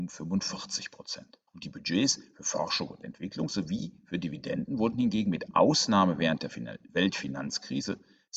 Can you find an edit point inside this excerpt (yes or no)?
yes